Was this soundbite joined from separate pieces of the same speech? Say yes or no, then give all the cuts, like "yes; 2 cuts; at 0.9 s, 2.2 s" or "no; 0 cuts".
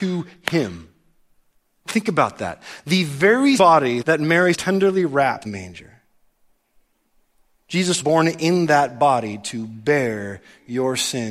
yes; 6 cuts; at 1.6 s, 3.6 s, 4.0 s, 4.5 s, 5.4 s, 8.0 s